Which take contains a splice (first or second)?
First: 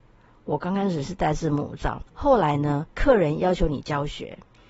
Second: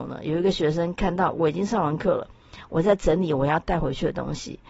first